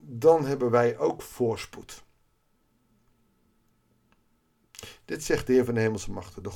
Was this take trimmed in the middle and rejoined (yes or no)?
no